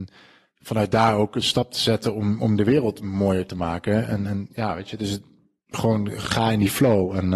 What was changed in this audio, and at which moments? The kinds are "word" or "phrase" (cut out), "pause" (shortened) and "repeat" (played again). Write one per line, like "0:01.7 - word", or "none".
none